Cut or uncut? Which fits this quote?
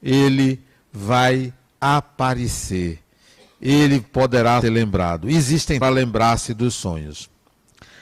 cut